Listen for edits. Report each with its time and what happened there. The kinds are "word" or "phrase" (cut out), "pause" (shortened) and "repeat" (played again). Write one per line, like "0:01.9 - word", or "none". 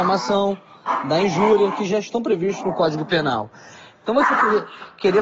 none